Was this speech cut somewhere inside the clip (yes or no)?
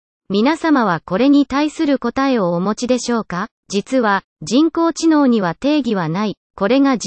yes